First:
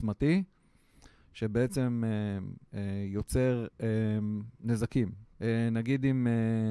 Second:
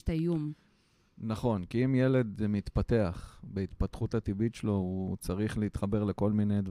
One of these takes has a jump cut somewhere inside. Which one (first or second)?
first